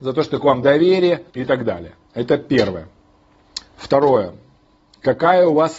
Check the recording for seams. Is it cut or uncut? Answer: cut